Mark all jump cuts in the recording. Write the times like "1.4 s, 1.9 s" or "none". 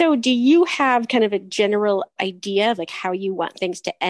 none